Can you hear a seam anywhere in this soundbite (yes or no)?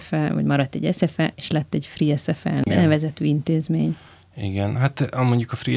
no